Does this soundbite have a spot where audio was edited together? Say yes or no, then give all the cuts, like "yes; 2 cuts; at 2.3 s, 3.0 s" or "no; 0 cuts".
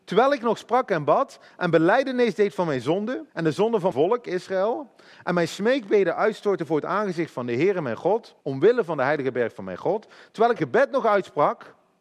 yes; 4 cuts; at 3.3 s, 3.9 s, 8.4 s, 10.6 s